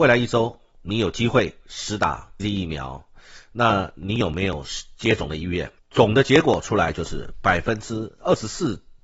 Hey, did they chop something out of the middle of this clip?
yes; 2 cuts; at 2.4 s, 5.8 s

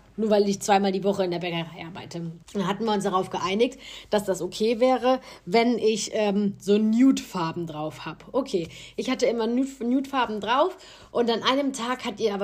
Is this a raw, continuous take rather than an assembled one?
no; 1 cut; at 2.4 s

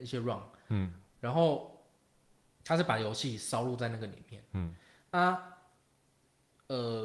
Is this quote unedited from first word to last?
yes; 0 cuts

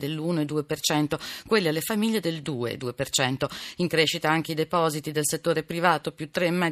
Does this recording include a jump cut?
no; 0 cuts

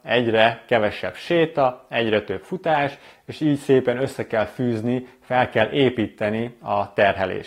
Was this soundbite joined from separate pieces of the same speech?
no; 0 cuts

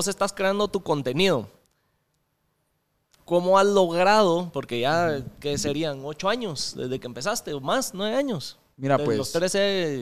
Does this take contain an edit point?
no; 0 cuts

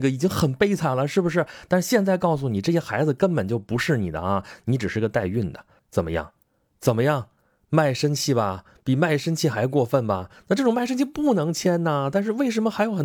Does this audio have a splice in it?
yes; 1 cut; at 5.8 s

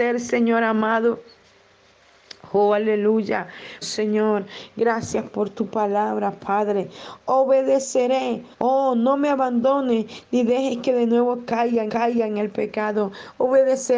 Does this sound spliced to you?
yes; 3 cuts; at 3.8 s, 8.5 s, 11.9 s

